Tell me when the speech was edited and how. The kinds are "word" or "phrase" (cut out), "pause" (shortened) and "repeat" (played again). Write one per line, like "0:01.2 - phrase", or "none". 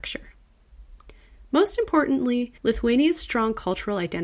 0:02.6 - pause

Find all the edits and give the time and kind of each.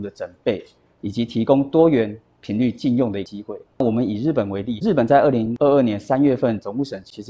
0:03.7 - pause

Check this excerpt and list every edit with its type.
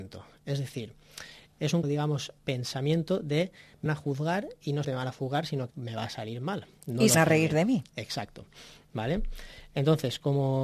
0:01.8 - word
0:02.4 - word
0:03.9 - word
0:04.8 - word
0:05.7 - word
0:07.1 - word

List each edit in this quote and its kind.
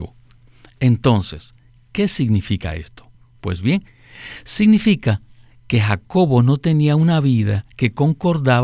none

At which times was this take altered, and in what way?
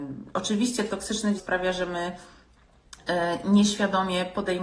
0:01.4 - word

